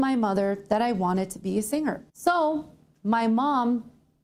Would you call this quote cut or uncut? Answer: cut